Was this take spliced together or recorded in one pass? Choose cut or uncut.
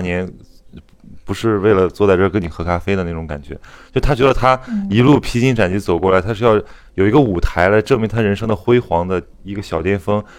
uncut